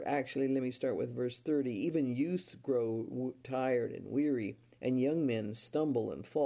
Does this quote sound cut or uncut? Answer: uncut